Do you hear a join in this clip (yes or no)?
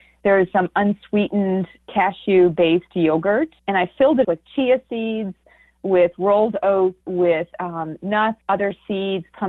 yes